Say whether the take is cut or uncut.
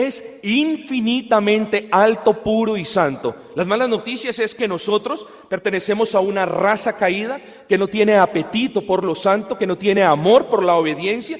uncut